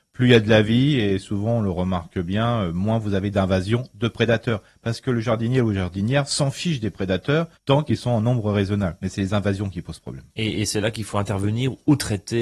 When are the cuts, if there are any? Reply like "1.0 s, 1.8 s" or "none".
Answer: 7.5 s, 10.3 s